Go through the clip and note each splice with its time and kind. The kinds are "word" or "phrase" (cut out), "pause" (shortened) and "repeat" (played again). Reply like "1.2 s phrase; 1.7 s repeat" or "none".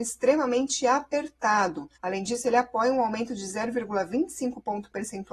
2.0 s pause